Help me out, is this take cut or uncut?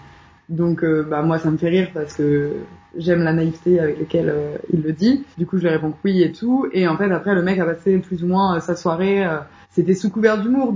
cut